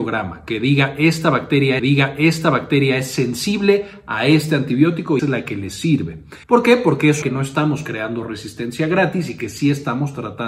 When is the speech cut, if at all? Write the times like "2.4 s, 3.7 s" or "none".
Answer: 1.8 s, 5.2 s, 6.4 s, 7.2 s